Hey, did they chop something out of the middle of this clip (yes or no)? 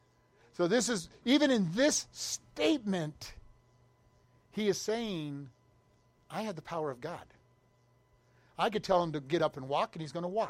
no